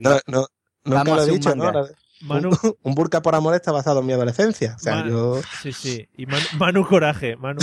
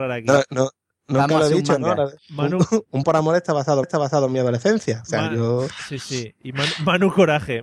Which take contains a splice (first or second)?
second